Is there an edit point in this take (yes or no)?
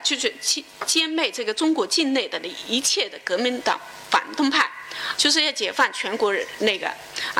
yes